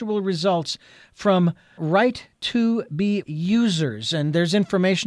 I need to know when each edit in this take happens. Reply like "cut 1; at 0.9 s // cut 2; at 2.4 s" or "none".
cut 1; at 1.8 s // cut 2; at 3.2 s